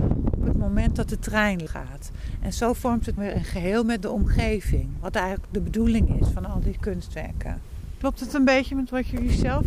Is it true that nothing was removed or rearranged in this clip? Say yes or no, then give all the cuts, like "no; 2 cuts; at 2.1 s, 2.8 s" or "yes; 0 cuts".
no; 2 cuts; at 1.7 s, 3.2 s